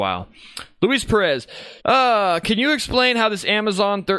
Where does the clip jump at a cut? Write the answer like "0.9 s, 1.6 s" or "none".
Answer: 1.8 s